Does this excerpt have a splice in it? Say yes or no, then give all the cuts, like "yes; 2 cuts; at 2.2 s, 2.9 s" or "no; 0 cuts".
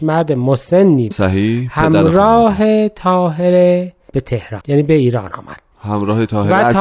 yes; 3 cuts; at 1.1 s, 4.6 s, 5.7 s